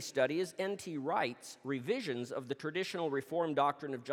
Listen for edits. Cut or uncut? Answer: uncut